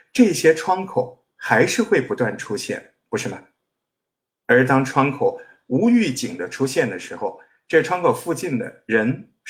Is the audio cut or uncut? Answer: uncut